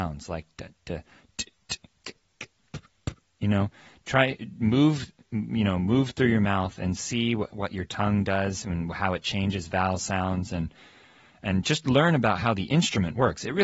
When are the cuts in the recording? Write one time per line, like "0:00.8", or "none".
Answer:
none